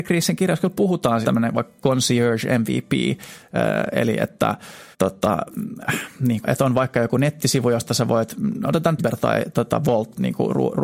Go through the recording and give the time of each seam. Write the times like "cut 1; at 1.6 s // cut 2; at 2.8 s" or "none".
cut 1; at 1.2 s // cut 2; at 4.9 s // cut 3; at 6.4 s // cut 4; at 9.0 s // cut 5; at 9.5 s